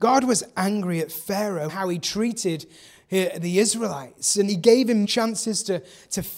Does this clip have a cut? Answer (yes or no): yes